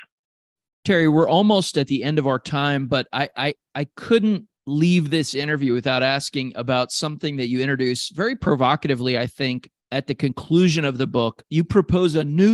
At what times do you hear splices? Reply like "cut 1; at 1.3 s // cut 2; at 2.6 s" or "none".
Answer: cut 1; at 4.5 s // cut 2; at 9.8 s